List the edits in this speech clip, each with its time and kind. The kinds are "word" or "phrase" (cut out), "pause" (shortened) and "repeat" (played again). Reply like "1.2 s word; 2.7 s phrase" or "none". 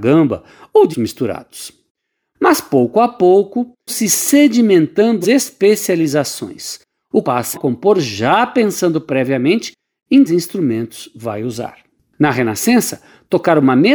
0.9 s word; 3.9 s word; 5.2 s word; 7.2 s word; 7.5 s word; 10.3 s word